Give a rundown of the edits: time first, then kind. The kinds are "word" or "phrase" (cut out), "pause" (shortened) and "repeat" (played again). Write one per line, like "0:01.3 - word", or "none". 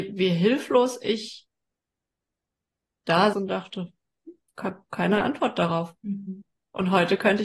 0:03.3 - word
0:04.5 - pause
0:06.0 - pause